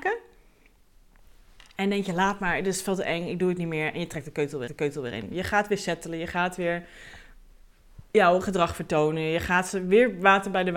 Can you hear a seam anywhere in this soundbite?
yes; 1 cut; at 4.7 s

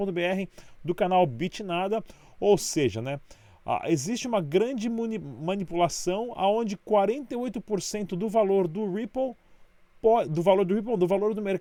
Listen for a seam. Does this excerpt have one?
no; 0 cuts

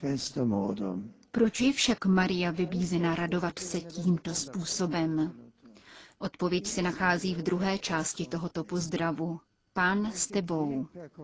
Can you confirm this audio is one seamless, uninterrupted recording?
yes; 0 cuts

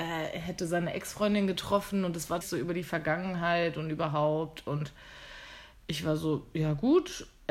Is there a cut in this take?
yes; 1 cut; at 2.4 s

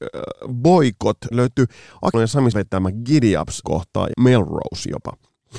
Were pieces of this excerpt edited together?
yes; 5 cuts; at 1.3 s, 2.1 s, 2.5 s, 3.6 s, 4.1 s

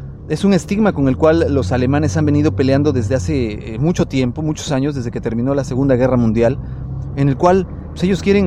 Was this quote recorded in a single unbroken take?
yes; 0 cuts

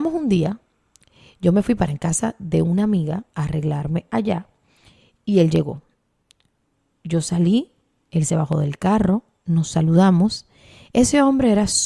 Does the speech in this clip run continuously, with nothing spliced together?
yes; 0 cuts

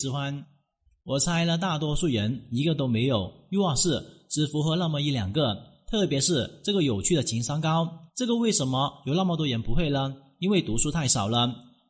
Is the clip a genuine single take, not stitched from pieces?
no; 1 cut; at 8.1 s

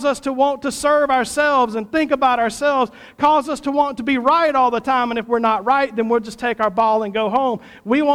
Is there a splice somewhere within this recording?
no; 0 cuts

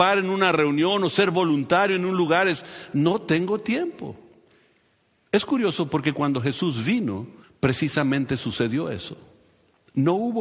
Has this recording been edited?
yes; 1 cut; at 7.4 s

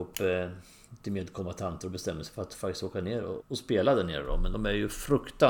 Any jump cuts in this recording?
yes; 1 cut; at 3.4 s

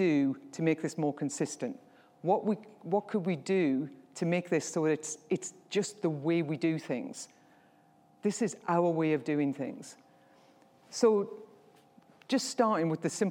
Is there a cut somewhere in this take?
no; 0 cuts

